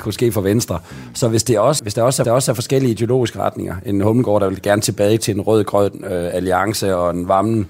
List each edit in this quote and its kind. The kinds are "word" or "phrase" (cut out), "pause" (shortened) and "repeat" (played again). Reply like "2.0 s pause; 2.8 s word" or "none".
1.8 s word; 2.2 s repeat